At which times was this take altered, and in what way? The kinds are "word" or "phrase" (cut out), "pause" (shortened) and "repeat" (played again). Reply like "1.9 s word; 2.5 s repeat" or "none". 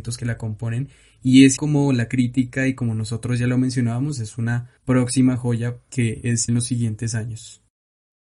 1.6 s word; 4.8 s pause; 6.5 s word